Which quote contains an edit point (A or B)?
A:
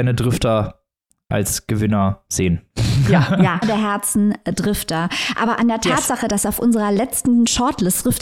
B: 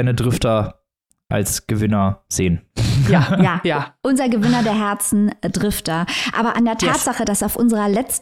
A